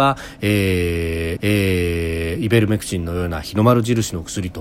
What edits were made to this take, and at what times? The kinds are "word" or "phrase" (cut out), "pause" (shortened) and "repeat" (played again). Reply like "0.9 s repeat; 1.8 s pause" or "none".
1.4 s repeat

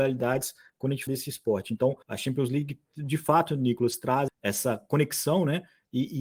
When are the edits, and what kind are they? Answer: 1.1 s word; 2.0 s pause; 4.3 s word

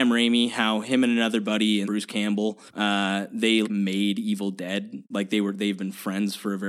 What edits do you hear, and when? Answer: 1.8 s word; 2.7 s pause; 3.6 s word

